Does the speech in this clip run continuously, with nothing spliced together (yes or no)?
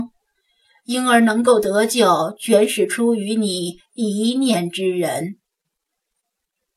yes